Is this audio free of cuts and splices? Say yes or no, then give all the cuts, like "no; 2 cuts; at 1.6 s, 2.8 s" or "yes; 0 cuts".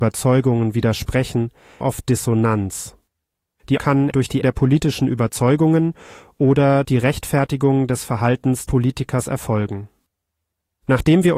no; 6 cuts; at 1.8 s, 3.8 s, 4.1 s, 4.4 s, 6.8 s, 8.7 s